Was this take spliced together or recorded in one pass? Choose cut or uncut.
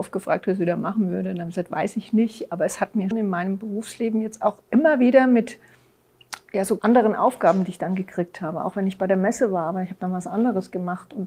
cut